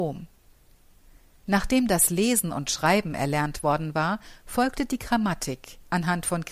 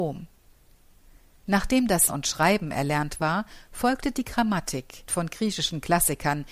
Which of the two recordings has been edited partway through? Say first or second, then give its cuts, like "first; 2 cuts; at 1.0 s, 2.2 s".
second; 3 cuts; at 2.1 s, 3.2 s, 5.1 s